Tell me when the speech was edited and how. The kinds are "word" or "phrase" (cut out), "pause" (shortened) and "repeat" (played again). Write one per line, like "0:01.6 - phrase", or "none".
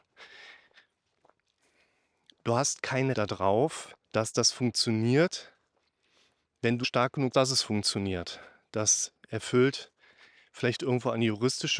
0:03.1 - word
0:04.0 - pause
0:06.8 - word
0:07.3 - word